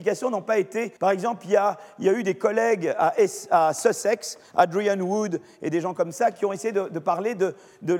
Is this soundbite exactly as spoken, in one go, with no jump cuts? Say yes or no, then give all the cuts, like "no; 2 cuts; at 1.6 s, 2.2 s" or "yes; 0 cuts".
no; 1 cut; at 1.0 s